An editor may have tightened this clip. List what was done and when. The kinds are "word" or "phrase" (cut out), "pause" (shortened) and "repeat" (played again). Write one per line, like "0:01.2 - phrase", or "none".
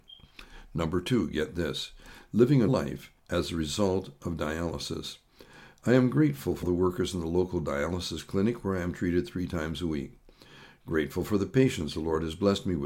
0:02.7 - word
0:03.2 - pause
0:06.6 - word